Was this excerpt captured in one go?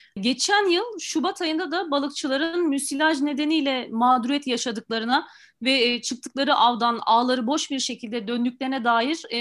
yes; 0 cuts

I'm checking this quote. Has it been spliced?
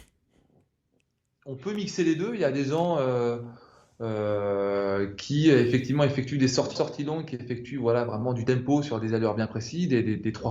yes; 1 cut; at 6.8 s

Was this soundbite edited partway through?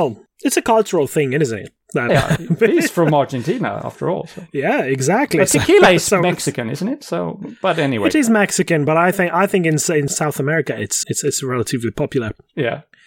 yes; 2 cuts; at 2.1 s, 11.0 s

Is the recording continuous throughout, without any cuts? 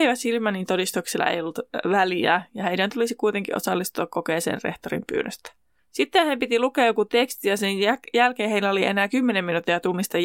yes; 0 cuts

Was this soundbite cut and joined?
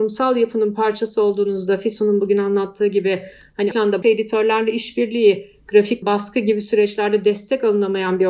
yes; 3 cuts; at 3.7 s, 4.0 s, 6.0 s

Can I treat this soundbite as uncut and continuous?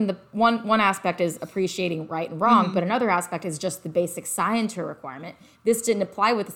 yes; 0 cuts

